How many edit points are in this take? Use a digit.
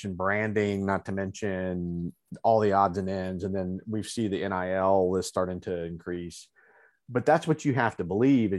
0